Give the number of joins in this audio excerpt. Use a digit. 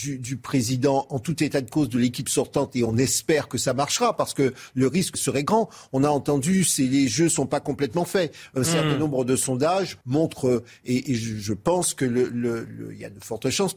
2